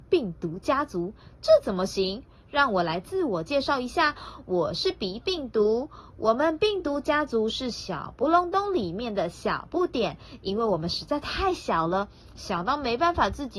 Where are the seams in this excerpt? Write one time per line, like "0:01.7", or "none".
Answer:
none

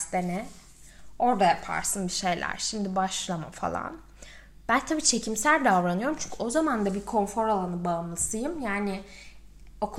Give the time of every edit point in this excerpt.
none

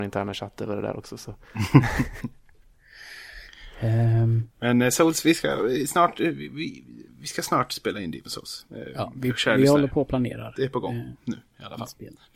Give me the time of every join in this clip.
0:04.5
0:07.1

